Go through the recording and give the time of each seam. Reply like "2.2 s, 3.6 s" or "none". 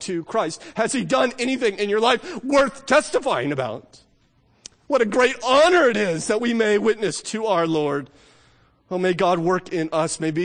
none